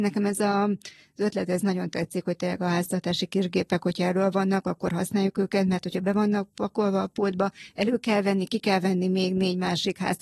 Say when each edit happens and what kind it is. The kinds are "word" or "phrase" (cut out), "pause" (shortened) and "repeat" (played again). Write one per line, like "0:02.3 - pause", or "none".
none